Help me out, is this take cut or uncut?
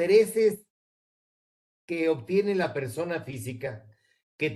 uncut